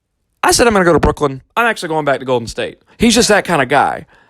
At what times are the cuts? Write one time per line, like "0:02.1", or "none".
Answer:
0:01.5
0:02.9